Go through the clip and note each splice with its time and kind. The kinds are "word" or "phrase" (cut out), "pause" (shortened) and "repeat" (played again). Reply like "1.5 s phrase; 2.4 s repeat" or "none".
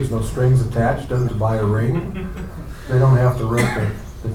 1.3 s word